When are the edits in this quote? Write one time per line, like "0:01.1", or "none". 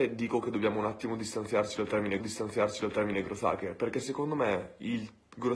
0:02.2